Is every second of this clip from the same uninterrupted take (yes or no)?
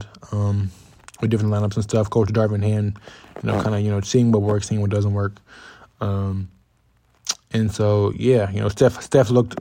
yes